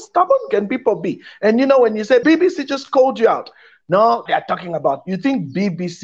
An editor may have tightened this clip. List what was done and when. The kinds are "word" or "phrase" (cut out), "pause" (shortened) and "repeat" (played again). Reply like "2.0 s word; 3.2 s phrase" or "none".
2.2 s word; 4.3 s phrase